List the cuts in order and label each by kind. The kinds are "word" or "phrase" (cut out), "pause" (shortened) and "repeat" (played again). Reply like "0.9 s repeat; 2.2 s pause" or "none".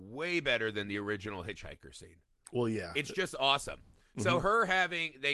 none